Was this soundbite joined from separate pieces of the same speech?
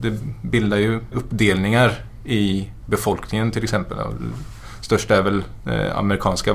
yes; 1 cut; at 1.1 s

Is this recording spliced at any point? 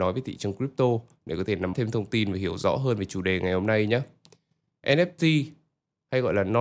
yes; 1 cut; at 1.7 s

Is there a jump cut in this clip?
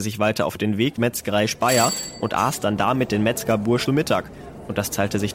yes; 2 cuts; at 1.0 s, 3.9 s

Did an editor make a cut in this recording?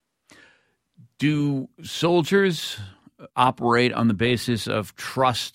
yes; 1 cut; at 3.3 s

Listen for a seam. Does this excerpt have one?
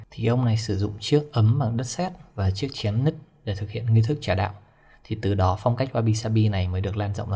no; 0 cuts

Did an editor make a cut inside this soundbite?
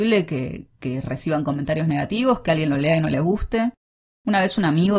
no; 0 cuts

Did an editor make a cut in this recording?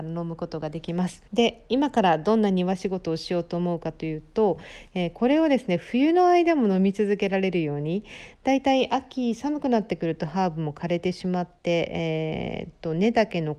yes; 1 cut; at 1.3 s

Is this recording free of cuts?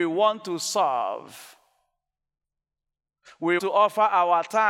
no; 1 cut; at 3.6 s

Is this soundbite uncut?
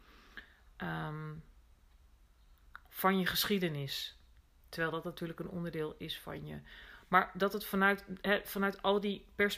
yes; 0 cuts

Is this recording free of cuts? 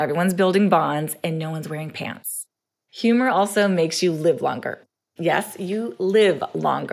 yes; 0 cuts

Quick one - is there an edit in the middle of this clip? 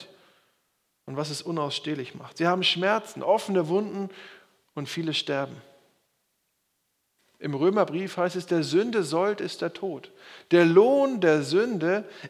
no; 0 cuts

